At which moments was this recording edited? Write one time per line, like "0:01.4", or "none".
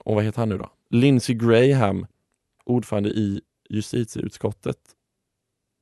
none

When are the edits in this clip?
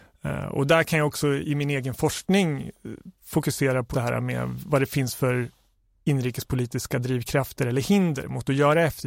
0:03.9

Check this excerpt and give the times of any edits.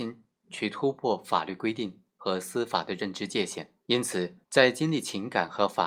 0:03.8
0:04.4

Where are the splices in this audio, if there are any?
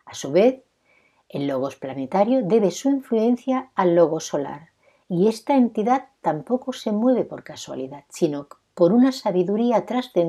none

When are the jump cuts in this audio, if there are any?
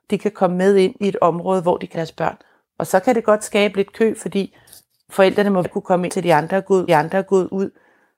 0:01.9
0:05.6
0:06.1
0:06.9

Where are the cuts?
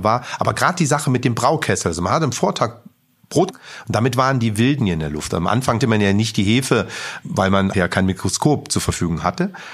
0:03.5
0:04.8
0:05.8
0:07.2
0:07.7

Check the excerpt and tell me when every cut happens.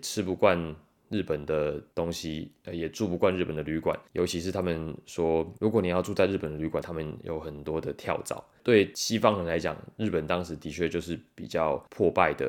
0:06.8

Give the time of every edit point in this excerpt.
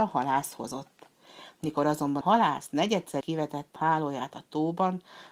0:02.2
0:03.2
0:03.8

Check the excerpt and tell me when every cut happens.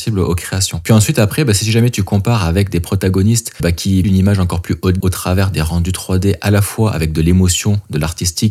0:03.6
0:04.0
0:05.0

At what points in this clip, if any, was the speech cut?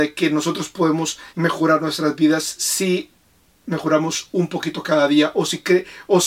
0:01.3

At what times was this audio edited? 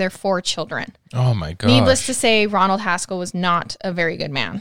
none

